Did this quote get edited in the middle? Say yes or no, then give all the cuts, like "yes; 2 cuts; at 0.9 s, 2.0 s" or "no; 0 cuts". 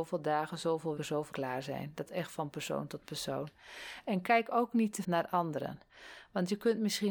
yes; 4 cuts; at 1.0 s, 1.3 s, 2.1 s, 5.0 s